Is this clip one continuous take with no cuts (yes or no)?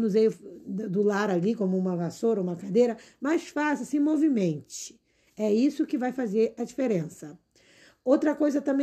yes